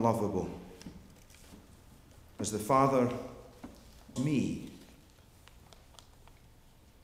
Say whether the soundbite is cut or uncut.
cut